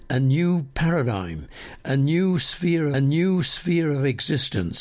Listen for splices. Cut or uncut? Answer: cut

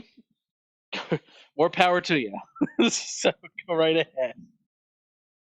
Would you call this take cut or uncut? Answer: uncut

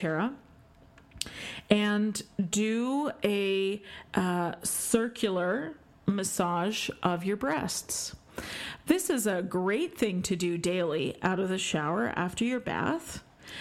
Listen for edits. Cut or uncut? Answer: uncut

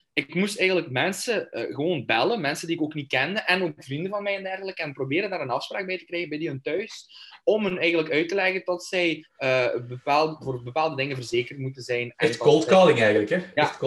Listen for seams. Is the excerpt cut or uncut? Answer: uncut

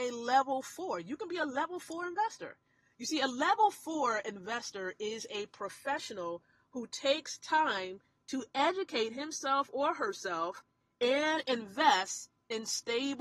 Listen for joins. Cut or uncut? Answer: uncut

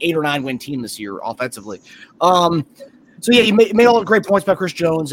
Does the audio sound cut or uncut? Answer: uncut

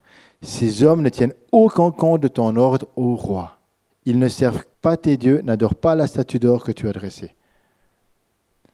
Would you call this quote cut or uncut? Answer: cut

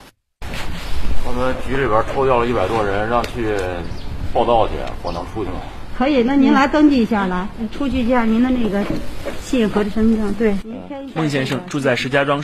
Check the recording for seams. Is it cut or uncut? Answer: uncut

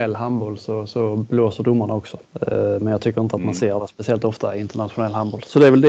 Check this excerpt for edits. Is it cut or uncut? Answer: cut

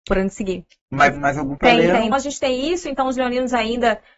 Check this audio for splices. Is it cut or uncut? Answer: cut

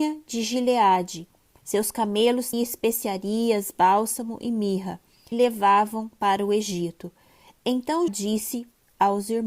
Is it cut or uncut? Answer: cut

